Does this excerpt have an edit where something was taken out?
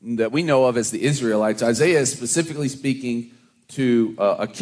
no; 0 cuts

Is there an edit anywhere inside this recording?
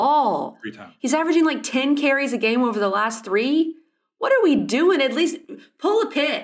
no; 0 cuts

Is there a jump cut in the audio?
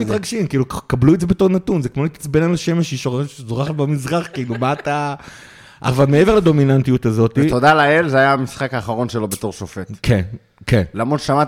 no; 0 cuts

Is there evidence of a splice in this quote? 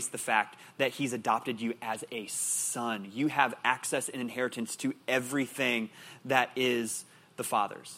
no; 0 cuts

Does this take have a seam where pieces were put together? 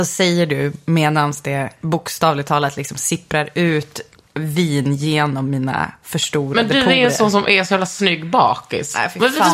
no; 0 cuts

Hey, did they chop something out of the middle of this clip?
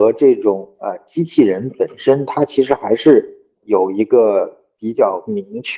yes; 1 cut; at 3.6 s

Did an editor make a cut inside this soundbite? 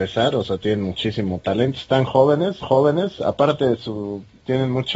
yes; 1 cut; at 2.6 s

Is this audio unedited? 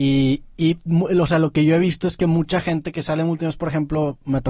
yes; 0 cuts

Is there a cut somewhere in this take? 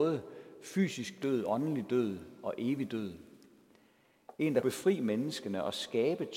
yes; 1 cut; at 4.6 s

